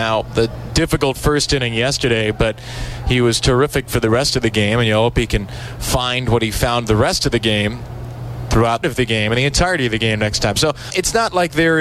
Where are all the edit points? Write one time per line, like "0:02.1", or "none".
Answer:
0:08.8
0:10.9

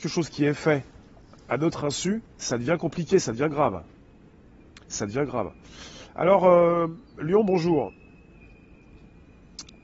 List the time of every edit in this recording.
0:02.3
0:04.8

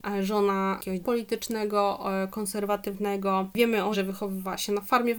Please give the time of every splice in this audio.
0:01.0
0:03.9

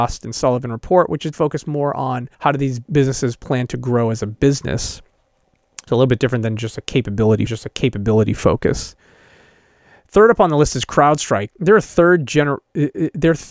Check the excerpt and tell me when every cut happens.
0:01.3
0:02.3
0:02.9
0:07.5
0:11.5

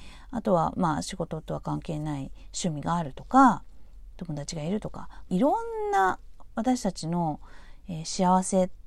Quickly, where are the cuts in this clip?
0:05.3

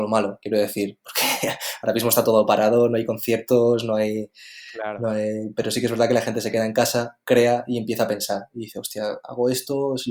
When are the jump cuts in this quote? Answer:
none

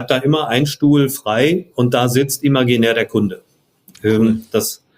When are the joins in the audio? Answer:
none

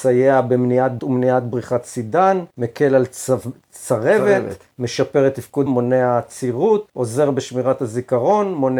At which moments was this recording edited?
0:01.0
0:02.5
0:04.7
0:05.7
0:06.9

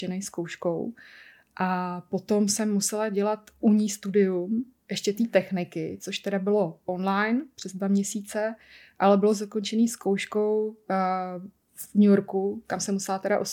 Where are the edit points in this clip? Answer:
none

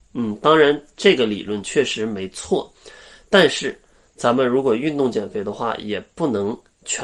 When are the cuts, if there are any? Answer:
none

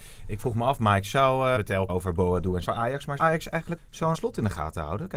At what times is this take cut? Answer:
0:01.6
0:01.9
0:02.6
0:03.2
0:03.8
0:04.1

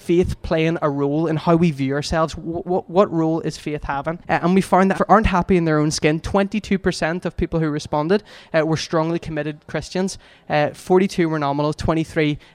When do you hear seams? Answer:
0:04.2
0:04.9

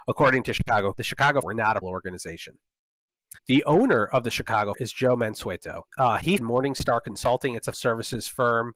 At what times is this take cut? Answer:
0:00.9
0:01.4
0:01.8
0:03.4
0:04.7
0:05.9
0:06.4
0:07.7

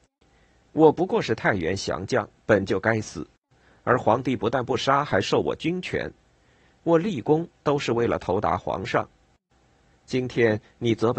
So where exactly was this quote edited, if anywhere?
none

